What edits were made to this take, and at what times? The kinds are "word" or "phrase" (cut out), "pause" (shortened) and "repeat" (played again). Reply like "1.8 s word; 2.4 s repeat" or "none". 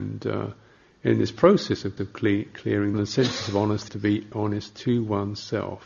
2.0 s repeat; 2.9 s phrase; 3.9 s word; 4.3 s word